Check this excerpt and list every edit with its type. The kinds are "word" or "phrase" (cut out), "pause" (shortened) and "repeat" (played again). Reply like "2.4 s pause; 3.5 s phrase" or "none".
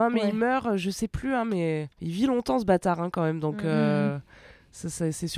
1.9 s pause